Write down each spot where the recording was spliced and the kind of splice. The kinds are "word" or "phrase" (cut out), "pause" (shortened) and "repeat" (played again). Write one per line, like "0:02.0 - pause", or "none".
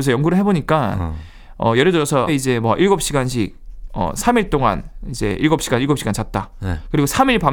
0:02.3 - word